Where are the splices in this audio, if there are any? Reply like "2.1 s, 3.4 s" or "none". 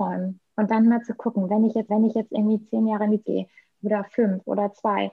1.9 s, 3.2 s